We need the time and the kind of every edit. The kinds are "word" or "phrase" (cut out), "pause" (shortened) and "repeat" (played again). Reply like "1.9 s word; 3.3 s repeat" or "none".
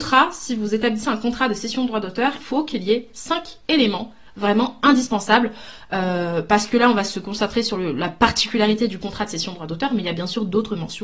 2.4 s word